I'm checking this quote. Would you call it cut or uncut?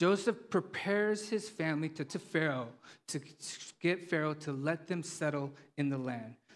cut